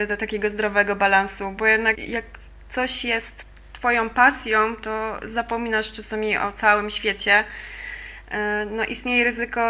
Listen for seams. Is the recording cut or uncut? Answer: cut